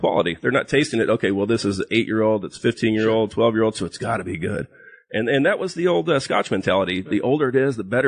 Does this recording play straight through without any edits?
yes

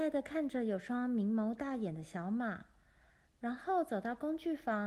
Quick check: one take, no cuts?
yes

